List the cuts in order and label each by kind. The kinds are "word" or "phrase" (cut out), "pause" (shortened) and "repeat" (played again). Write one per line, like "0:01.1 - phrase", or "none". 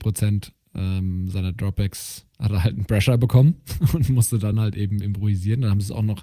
none